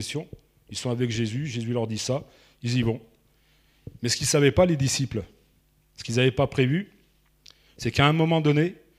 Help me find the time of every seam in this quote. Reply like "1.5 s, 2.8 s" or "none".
none